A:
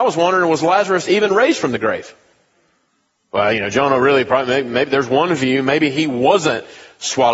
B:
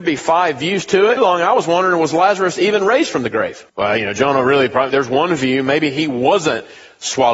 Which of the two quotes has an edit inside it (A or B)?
B